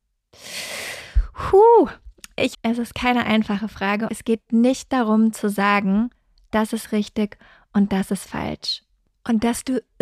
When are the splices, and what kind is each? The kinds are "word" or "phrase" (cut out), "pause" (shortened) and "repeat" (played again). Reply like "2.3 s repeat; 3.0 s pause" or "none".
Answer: 2.5 s word; 4.1 s phrase